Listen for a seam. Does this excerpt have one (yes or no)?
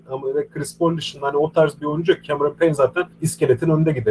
yes